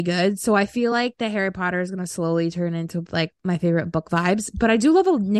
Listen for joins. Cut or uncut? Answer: uncut